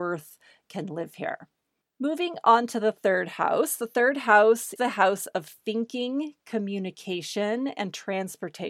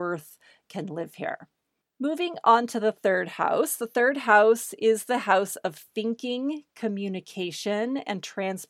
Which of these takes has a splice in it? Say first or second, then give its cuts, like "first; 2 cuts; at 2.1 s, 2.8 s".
first; 1 cut; at 4.8 s